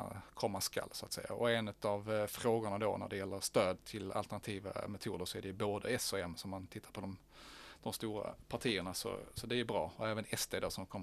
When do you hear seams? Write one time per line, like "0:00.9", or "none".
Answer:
none